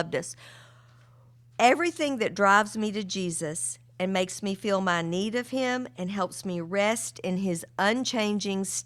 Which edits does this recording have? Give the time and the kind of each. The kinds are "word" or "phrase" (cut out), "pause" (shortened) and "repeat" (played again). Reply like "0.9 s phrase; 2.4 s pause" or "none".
none